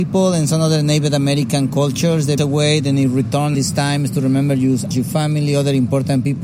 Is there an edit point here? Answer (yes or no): yes